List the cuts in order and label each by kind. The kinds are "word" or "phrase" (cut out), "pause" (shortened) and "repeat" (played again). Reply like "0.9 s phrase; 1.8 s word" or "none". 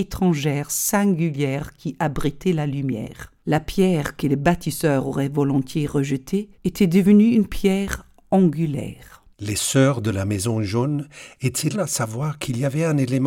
3.4 s pause; 6.5 s pause; 9.3 s pause; 11.7 s word